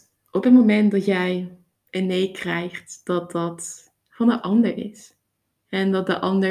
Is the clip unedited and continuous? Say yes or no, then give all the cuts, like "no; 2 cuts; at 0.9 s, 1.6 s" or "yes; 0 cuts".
yes; 0 cuts